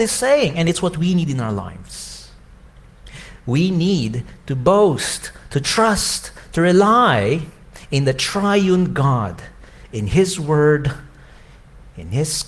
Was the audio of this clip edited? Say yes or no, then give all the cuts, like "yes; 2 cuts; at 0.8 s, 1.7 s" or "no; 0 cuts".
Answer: no; 0 cuts